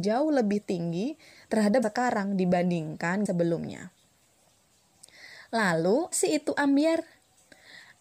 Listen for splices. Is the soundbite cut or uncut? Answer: cut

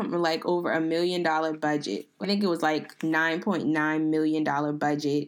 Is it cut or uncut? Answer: cut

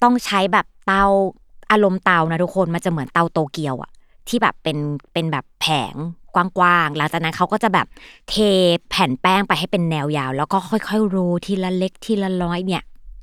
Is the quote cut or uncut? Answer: uncut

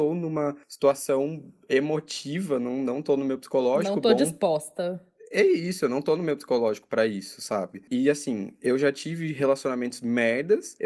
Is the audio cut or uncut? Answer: uncut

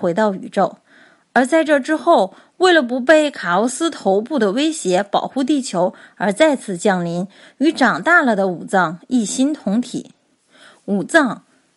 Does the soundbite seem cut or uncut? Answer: uncut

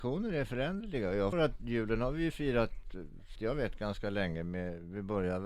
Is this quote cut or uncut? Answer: cut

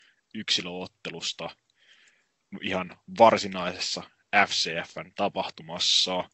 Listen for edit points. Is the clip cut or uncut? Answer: uncut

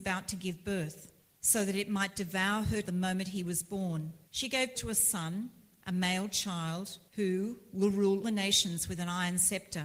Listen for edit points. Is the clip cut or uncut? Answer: cut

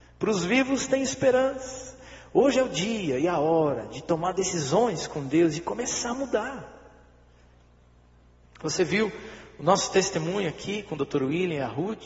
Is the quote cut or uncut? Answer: uncut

